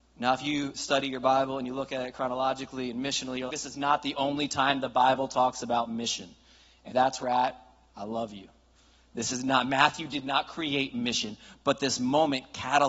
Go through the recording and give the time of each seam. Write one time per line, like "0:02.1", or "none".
0:03.5
0:06.9
0:07.2